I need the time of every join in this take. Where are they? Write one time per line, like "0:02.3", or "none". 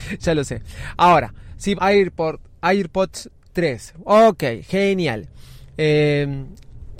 0:01.8